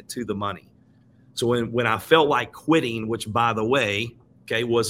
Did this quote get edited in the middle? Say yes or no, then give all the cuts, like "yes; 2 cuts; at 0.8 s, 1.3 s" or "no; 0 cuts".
no; 0 cuts